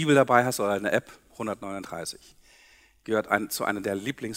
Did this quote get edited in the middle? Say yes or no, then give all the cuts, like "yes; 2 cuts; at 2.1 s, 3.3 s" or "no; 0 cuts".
yes; 1 cut; at 1.3 s